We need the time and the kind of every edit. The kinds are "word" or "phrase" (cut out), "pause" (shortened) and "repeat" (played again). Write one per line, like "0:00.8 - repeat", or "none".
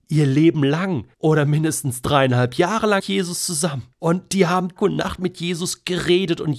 0:01.1 - pause
0:03.0 - word
0:03.9 - pause
0:04.8 - word